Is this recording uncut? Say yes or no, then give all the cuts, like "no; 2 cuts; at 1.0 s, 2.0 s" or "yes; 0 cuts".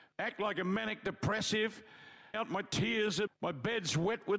no; 2 cuts; at 2.3 s, 3.3 s